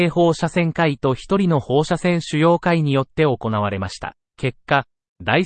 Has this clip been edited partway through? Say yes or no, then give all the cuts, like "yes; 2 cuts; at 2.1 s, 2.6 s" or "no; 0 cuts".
yes; 1 cut; at 4.3 s